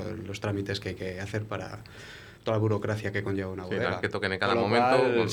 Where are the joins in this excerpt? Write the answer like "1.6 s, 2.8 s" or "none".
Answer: 2.4 s, 4.0 s